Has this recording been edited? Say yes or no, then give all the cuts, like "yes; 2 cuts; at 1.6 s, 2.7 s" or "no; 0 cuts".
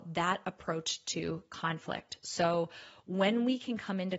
no; 0 cuts